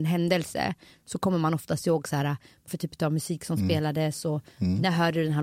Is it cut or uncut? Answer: cut